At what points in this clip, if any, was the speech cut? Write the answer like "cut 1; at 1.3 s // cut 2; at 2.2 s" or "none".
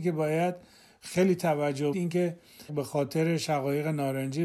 cut 1; at 1.9 s // cut 2; at 2.7 s